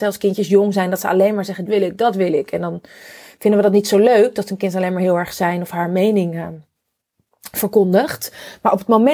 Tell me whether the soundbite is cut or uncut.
cut